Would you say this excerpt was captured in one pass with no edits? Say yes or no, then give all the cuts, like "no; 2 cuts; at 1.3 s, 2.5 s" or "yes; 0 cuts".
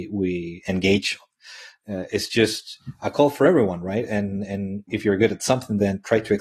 yes; 0 cuts